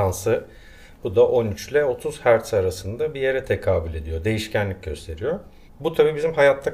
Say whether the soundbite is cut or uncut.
cut